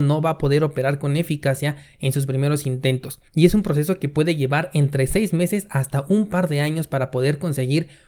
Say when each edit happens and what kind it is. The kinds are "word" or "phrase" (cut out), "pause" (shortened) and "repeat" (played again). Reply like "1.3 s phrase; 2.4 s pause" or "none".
3.3 s pause